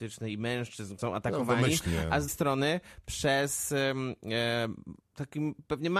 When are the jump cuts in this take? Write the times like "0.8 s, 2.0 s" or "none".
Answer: 1.0 s, 2.3 s, 5.0 s